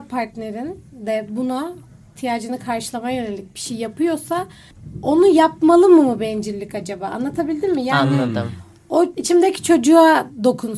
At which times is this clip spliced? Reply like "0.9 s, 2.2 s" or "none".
none